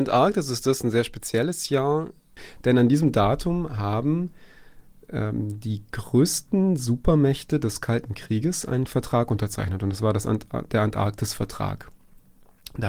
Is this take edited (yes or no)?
no